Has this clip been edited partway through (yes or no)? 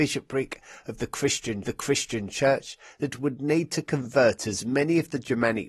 yes